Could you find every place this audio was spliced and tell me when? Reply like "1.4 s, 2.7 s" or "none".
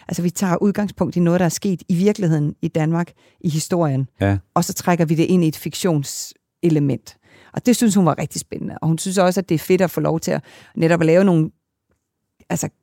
none